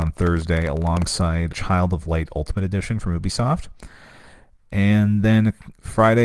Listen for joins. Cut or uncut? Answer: cut